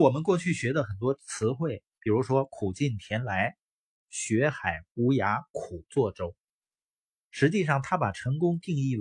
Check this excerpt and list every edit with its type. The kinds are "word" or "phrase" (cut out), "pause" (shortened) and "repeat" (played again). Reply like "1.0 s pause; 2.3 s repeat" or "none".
6.5 s pause